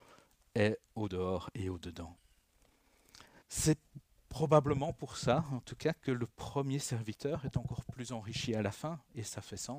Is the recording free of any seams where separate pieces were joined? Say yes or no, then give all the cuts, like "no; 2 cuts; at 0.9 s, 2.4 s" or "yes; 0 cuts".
no; 1 cut; at 3.4 s